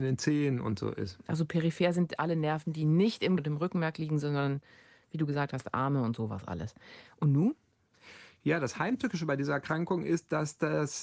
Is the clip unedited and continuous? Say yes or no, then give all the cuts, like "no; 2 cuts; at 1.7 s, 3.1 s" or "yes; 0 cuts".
no; 1 cut; at 3.4 s